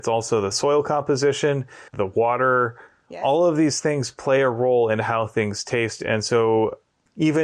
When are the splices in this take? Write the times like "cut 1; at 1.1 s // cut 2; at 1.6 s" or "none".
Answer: cut 1; at 1.9 s